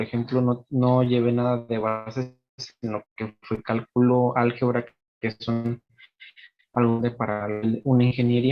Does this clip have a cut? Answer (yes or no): no